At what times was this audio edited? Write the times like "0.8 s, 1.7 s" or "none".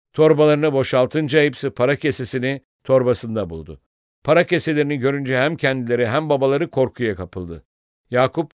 none